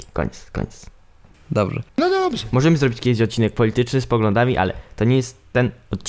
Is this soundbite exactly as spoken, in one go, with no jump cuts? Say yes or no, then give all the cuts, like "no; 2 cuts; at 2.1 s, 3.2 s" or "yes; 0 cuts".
yes; 0 cuts